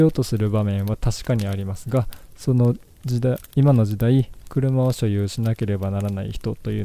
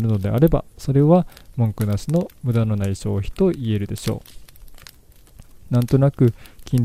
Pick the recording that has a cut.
first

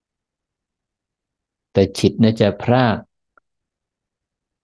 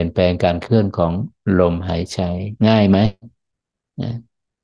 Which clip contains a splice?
second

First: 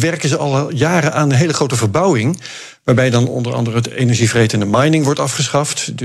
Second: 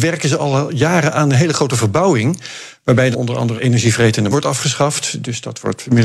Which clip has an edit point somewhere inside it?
second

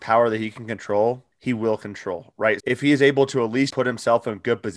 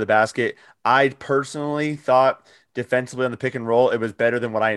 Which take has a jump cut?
first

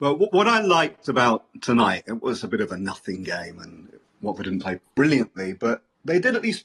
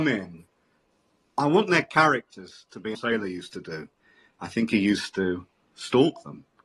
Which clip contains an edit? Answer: second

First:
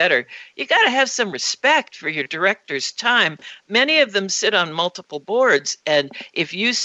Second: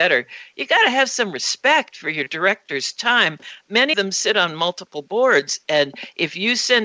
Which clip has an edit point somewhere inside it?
second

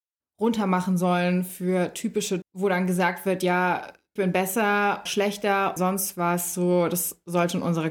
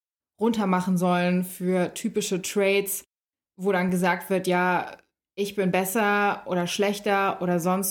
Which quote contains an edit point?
first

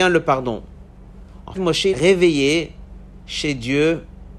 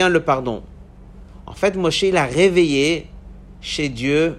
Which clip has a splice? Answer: first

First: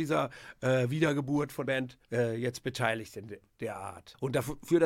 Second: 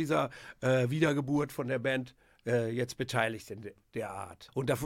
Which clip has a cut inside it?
first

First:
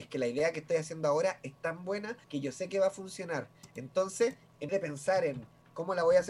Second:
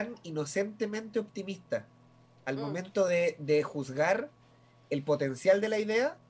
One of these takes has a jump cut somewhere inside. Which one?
first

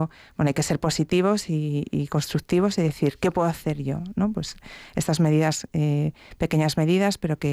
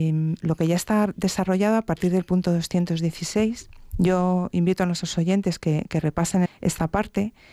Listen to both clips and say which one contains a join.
second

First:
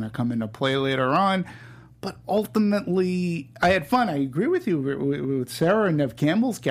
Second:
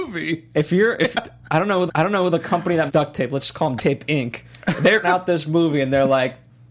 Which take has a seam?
second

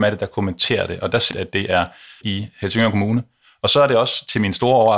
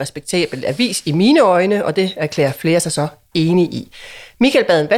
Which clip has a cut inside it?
first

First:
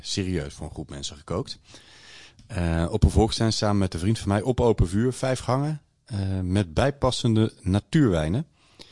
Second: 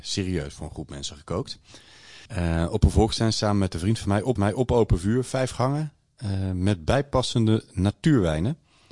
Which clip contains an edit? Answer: second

